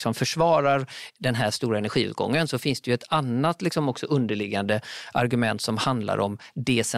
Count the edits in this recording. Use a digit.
0